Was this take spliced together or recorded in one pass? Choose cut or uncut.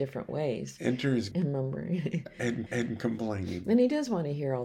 cut